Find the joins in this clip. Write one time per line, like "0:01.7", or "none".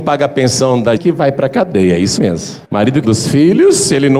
0:01.0
0:02.2
0:02.6
0:03.0

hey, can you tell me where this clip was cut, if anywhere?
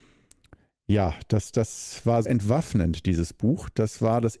0:02.2

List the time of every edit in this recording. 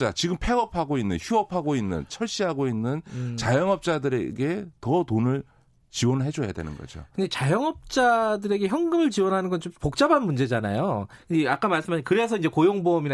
none

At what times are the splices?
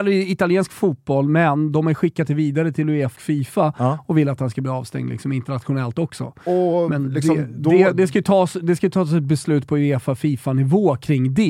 0:03.1

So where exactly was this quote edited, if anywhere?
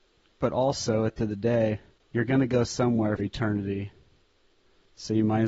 0:01.2
0:02.0
0:03.2

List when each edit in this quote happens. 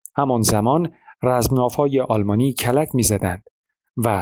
none

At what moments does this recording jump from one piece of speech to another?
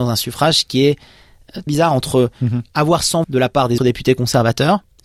0:01.7
0:03.2
0:03.8

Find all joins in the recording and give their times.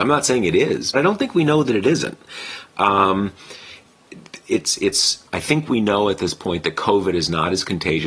0:00.9
0:05.3

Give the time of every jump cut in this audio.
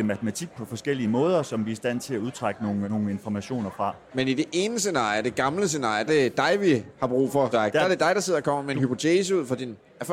0:02.8
0:06.1
0:07.5

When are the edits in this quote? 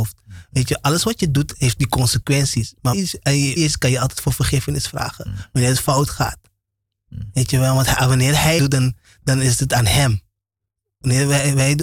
0:02.9
0:03.6
0:08.6

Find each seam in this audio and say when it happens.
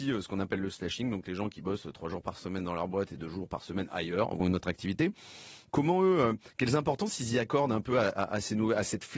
0:04.4

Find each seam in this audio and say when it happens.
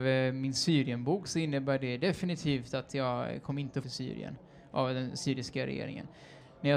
0:03.8

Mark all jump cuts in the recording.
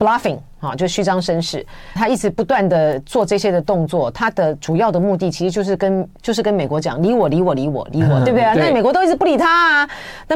0:02.0

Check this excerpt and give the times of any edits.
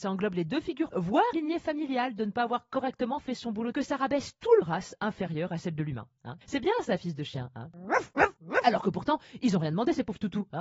0:00.9
0:01.3
0:03.7
0:04.6
0:06.4

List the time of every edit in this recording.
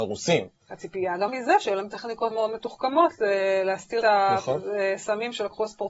0:01.3
0:02.3
0:04.0

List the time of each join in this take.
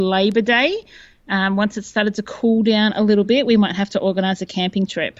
none

